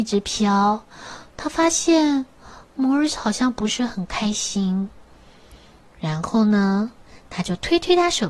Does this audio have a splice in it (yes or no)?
no